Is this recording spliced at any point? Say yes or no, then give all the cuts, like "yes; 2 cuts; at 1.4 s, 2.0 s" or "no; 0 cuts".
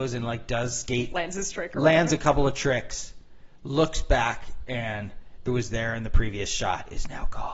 yes; 2 cuts; at 1.1 s, 5.5 s